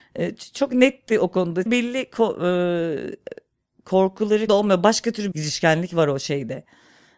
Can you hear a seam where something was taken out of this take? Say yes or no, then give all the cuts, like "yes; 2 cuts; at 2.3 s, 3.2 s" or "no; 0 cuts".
yes; 3 cuts; at 1.7 s, 4.5 s, 5.3 s